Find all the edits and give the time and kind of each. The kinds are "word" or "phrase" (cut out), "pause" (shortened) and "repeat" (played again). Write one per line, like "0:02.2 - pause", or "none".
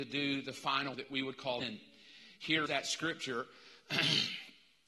0:00.9 - word
0:01.6 - word
0:02.7 - word